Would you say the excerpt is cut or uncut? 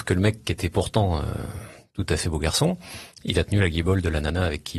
uncut